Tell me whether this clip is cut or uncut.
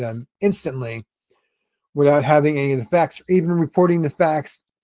uncut